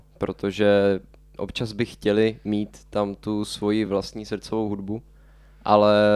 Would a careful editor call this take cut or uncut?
uncut